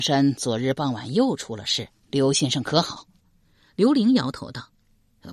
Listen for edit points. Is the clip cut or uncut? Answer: uncut